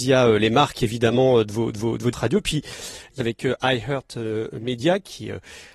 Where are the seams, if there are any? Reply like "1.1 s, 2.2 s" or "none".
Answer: 1.7 s, 2.1 s, 3.2 s